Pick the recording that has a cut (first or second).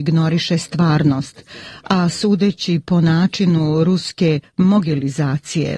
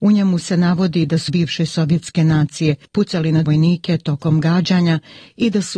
second